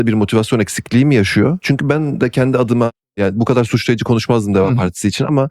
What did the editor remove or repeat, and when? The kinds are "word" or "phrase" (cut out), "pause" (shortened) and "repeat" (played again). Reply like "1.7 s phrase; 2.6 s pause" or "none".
none